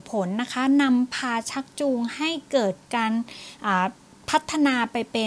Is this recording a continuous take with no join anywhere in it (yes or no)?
yes